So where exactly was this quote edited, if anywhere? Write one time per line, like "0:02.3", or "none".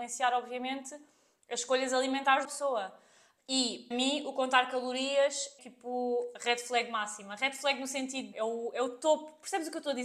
0:02.4
0:03.9
0:05.6